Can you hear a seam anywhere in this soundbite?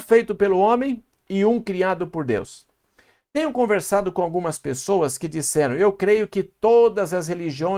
no; 0 cuts

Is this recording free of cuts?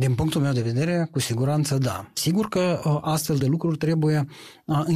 yes; 0 cuts

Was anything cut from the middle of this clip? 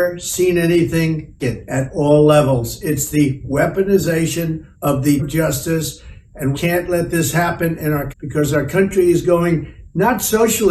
yes; 5 cuts; at 1.4 s, 4.7 s, 5.2 s, 6.5 s, 8.1 s

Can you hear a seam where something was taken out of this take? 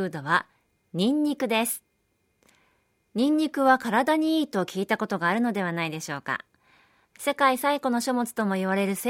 no; 0 cuts

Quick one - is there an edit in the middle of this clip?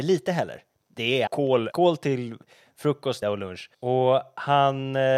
yes; 4 cuts; at 1.3 s, 1.7 s, 3.2 s, 3.7 s

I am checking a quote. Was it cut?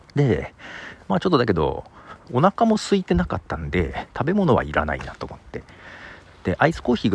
no; 0 cuts

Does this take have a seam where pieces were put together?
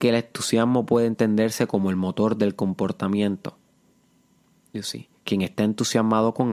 no; 0 cuts

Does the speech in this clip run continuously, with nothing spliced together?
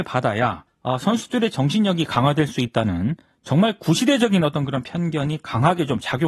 yes; 0 cuts

